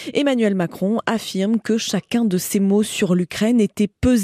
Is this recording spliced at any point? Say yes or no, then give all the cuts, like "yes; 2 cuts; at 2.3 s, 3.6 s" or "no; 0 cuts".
no; 0 cuts